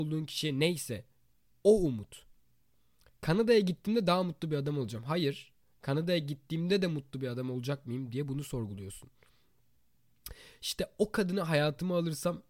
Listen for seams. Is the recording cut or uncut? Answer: uncut